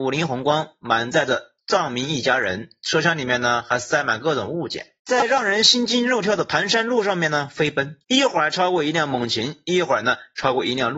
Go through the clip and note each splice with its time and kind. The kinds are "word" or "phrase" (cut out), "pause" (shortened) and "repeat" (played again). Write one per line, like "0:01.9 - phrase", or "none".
0:01.6 - pause
0:05.0 - pause
0:08.0 - pause